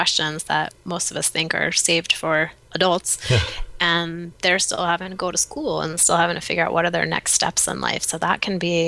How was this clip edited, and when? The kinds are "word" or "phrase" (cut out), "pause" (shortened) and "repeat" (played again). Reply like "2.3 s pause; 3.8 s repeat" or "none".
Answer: none